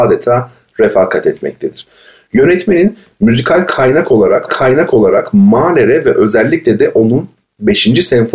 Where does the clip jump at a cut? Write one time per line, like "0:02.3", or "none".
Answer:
0:04.5